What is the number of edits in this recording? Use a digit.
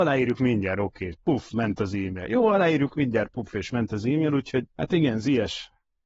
1